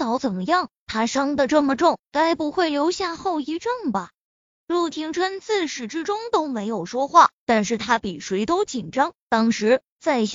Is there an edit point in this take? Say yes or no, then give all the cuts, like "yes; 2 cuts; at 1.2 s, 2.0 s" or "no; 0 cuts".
no; 0 cuts